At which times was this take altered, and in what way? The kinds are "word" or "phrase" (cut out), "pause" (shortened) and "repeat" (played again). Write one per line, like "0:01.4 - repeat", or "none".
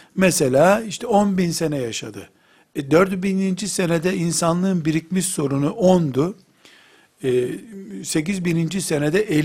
none